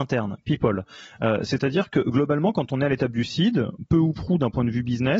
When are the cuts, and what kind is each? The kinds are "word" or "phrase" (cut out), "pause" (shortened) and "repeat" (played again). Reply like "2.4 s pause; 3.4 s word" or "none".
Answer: none